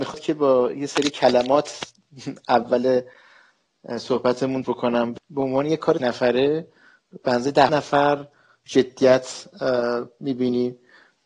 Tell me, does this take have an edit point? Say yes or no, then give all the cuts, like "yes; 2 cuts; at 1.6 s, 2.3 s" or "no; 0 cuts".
yes; 5 cuts; at 4.6 s, 5.2 s, 6.0 s, 7.7 s, 8.7 s